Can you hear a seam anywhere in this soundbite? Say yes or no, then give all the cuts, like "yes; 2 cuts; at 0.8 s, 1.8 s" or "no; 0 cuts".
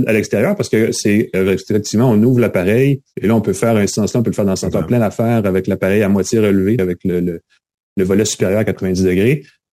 yes; 4 cuts; at 3.1 s, 3.9 s, 4.7 s, 6.8 s